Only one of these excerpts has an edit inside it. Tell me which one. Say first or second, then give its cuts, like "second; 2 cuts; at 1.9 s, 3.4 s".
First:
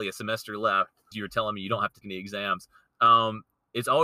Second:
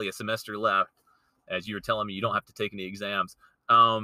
first; 2 cuts; at 1.1 s, 2.0 s